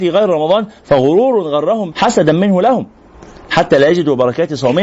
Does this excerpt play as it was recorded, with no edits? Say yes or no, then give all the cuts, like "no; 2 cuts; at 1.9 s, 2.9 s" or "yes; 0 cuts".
no; 1 cut; at 1.9 s